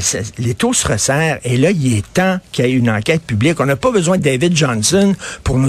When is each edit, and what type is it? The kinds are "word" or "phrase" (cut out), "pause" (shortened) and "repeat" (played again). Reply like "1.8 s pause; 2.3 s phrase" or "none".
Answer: none